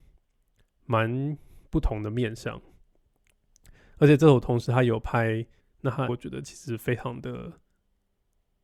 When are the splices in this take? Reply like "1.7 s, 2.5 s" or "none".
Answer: 5.6 s, 6.1 s

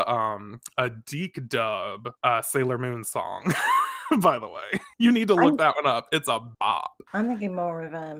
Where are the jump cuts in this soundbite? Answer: none

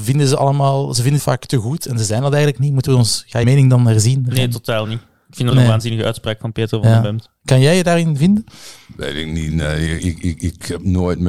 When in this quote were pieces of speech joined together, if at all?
1.2 s, 3.4 s, 5.5 s, 10.0 s

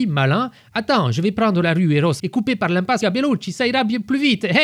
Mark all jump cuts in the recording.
2.2 s, 3.0 s

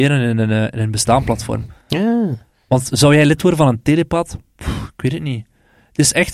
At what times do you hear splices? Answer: 1.8 s

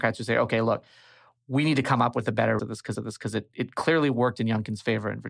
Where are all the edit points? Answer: 2.6 s, 2.9 s

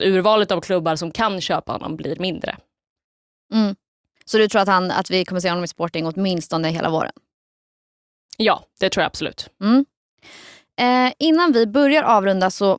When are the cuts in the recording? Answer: none

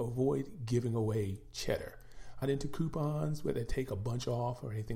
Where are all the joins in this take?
2.4 s

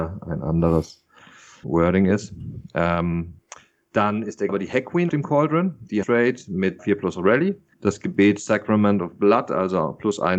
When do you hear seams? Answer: 1.6 s, 4.5 s, 5.1 s, 6.0 s, 6.8 s, 7.7 s

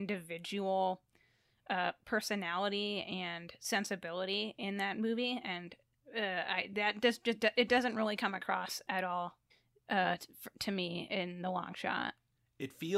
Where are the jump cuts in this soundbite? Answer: 9.5 s

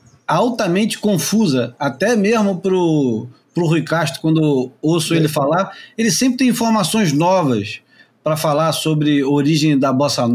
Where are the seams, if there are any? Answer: none

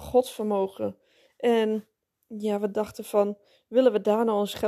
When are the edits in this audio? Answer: none

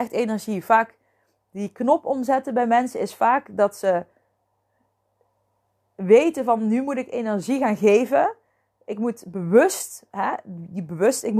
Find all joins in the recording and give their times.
none

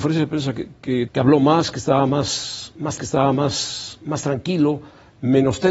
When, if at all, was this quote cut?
1.1 s, 3.0 s

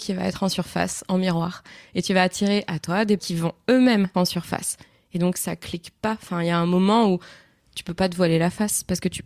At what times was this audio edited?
3.2 s, 4.1 s

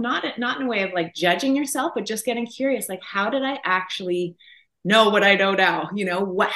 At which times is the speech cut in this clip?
none

